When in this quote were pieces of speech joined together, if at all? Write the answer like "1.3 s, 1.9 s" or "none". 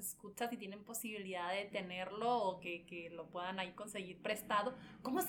none